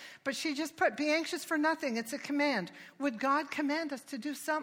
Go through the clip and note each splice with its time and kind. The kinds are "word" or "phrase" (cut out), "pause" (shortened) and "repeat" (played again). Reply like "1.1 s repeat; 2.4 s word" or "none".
none